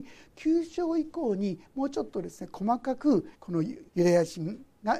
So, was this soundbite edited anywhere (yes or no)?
yes